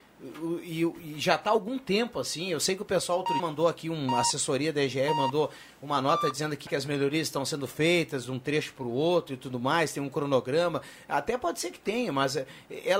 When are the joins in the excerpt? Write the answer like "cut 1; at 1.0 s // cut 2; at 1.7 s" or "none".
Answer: cut 1; at 3.4 s // cut 2; at 6.7 s